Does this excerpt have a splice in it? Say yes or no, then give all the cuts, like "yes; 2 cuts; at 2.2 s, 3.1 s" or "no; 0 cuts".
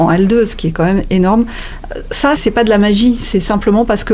yes; 1 cut; at 2.4 s